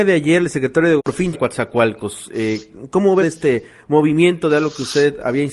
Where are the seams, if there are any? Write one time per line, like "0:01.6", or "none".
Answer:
0:01.0
0:01.3
0:03.2